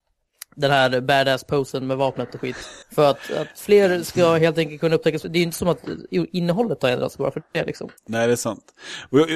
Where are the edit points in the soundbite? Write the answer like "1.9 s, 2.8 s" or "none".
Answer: 2.8 s, 8.0 s